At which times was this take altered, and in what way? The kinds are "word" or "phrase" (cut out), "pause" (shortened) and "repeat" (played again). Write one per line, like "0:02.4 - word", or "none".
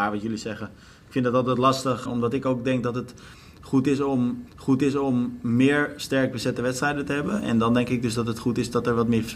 0:02.1 - word
0:04.5 - repeat